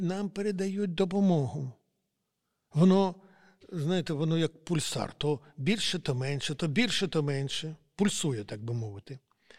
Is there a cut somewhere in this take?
no; 0 cuts

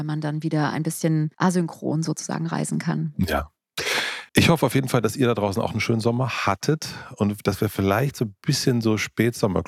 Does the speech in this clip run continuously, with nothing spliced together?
no; 2 cuts; at 1.3 s, 4.3 s

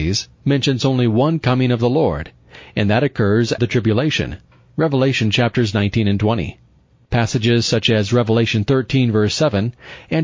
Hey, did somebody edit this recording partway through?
yes; 1 cut; at 3.6 s

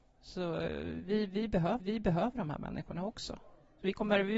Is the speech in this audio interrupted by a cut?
yes; 1 cut; at 1.8 s

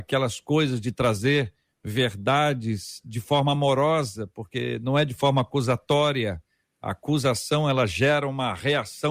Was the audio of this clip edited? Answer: no; 0 cuts

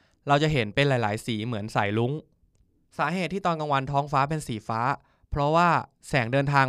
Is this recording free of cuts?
yes; 0 cuts

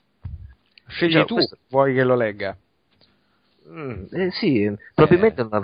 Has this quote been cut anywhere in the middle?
no; 0 cuts

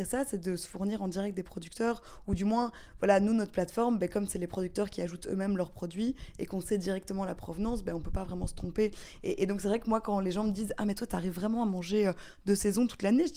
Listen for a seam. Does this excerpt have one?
no; 0 cuts

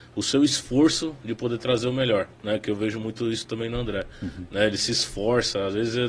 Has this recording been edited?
yes; 1 cut; at 2.3 s

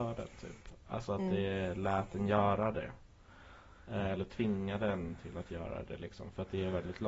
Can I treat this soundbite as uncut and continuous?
yes; 0 cuts

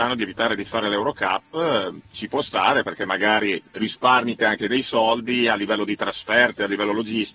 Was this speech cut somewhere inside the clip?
yes; 1 cut; at 4.4 s

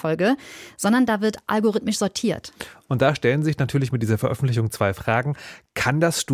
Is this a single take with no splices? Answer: yes; 0 cuts

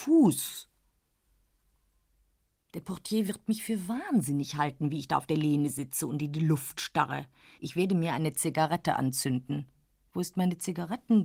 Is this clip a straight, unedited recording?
yes; 0 cuts

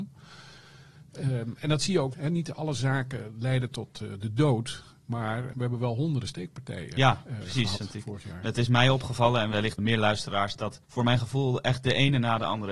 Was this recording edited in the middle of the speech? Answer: yes; 4 cuts; at 2.1 s, 5.5 s, 9.8 s, 10.8 s

